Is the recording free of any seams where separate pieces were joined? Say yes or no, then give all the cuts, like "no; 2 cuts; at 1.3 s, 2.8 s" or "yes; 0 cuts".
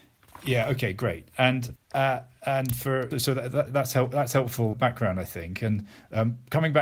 no; 4 cuts; at 1.8 s, 3.1 s, 3.7 s, 4.7 s